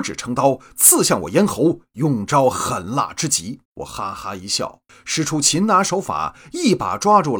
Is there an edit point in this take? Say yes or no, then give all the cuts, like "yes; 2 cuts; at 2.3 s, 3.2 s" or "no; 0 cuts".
yes; 2 cuts; at 3.7 s, 4.9 s